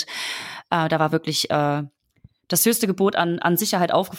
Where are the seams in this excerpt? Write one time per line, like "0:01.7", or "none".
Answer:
none